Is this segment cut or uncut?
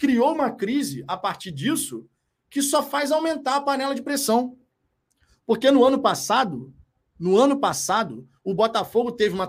uncut